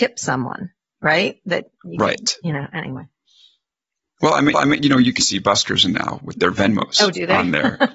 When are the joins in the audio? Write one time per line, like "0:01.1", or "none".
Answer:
0:04.5
0:05.2
0:05.9

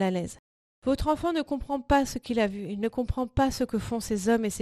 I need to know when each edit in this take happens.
none

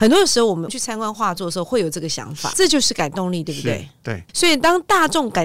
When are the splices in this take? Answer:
0:02.5

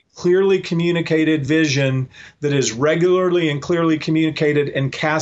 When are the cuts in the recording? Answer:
none

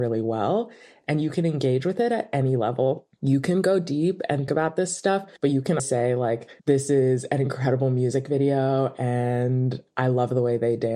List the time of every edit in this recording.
0:04.5
0:05.4
0:05.8
0:06.6

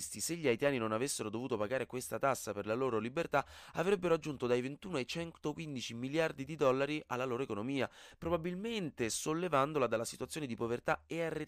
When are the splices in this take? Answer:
none

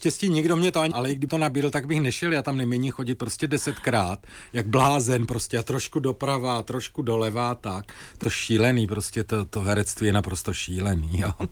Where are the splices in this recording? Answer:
0:00.9
0:01.3
0:08.2

